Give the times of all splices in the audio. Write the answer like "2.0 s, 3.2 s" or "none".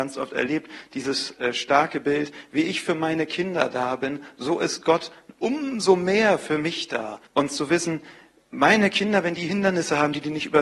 7.3 s